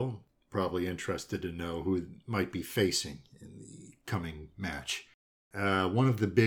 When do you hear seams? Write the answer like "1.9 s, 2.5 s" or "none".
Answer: 5.2 s